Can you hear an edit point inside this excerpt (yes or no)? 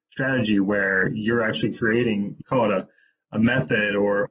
no